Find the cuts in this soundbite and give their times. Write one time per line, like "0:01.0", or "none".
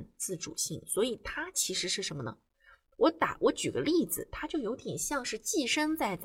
none